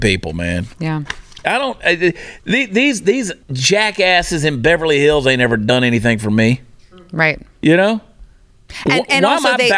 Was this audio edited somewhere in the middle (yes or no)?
yes